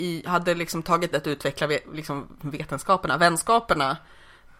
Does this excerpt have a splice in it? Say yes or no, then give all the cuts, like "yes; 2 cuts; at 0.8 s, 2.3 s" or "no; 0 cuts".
yes; 2 cuts; at 1.1 s, 2.3 s